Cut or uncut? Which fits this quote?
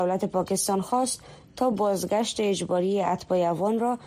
uncut